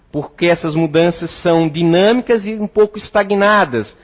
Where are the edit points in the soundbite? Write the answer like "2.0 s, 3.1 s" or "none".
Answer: none